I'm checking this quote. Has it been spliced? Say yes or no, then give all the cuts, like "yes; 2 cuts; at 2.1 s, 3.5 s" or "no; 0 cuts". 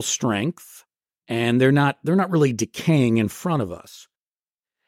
no; 0 cuts